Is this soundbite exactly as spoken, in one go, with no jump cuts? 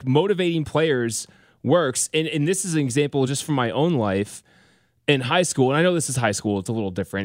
yes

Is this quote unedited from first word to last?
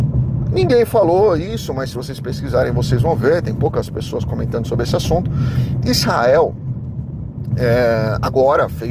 yes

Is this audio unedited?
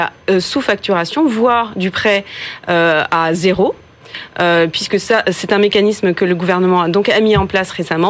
yes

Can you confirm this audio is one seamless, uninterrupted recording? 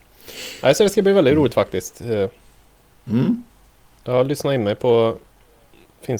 yes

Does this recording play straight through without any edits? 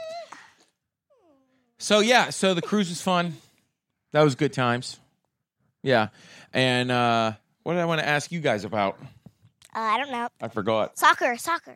yes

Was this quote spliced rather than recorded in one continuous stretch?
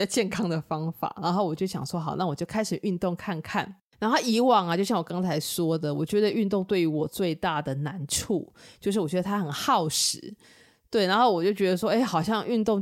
no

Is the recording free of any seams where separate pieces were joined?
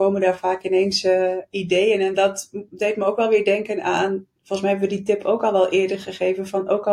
yes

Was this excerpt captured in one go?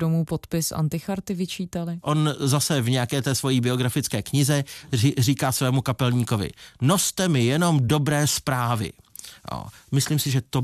yes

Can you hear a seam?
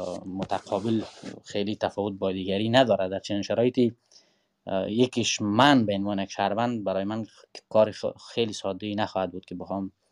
no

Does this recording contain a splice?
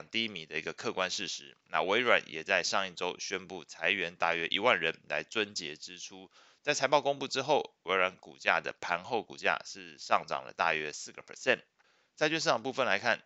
yes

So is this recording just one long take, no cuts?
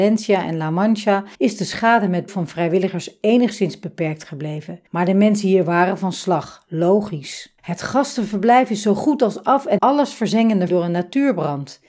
no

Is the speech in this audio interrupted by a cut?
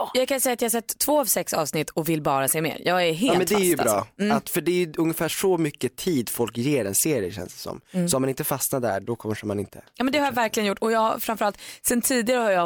no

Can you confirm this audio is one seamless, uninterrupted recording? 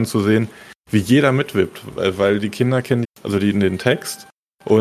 no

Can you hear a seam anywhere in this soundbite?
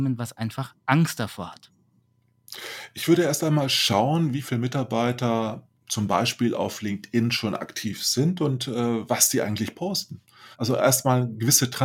yes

